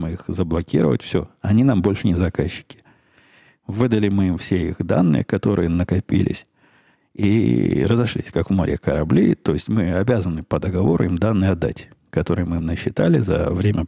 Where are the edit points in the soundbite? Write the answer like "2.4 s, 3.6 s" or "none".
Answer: none